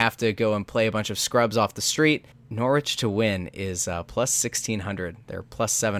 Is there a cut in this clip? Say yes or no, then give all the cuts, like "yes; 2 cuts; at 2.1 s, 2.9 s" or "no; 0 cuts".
yes; 1 cut; at 2.3 s